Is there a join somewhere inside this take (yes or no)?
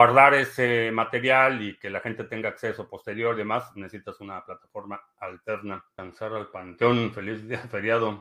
no